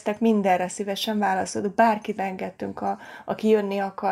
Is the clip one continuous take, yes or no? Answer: no